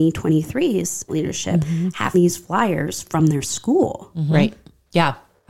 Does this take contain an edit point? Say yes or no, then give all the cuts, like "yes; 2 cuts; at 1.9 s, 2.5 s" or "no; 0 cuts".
yes; 2 cuts; at 1.1 s, 2.1 s